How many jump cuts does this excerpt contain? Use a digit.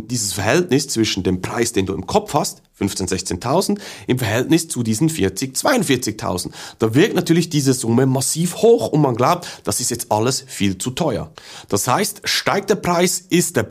0